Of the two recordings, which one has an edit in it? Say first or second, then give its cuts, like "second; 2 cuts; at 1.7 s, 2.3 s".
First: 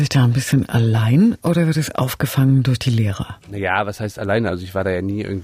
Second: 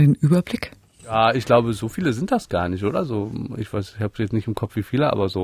first; 1 cut; at 3.4 s